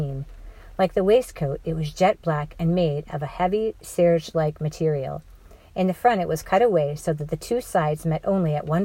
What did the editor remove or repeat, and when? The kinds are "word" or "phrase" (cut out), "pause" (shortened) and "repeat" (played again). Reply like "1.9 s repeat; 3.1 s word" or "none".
none